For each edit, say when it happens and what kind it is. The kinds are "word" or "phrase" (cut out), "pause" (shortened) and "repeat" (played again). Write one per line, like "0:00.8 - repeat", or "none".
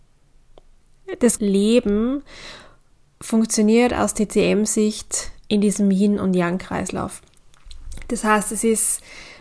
0:01.4 - word